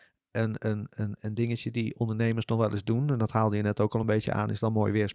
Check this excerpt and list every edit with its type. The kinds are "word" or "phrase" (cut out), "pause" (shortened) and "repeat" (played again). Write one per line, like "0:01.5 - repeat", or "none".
none